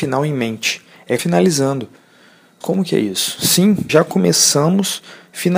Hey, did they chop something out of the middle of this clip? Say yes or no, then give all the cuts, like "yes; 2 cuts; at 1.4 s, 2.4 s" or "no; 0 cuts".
yes; 3 cuts; at 1.2 s, 2.6 s, 3.9 s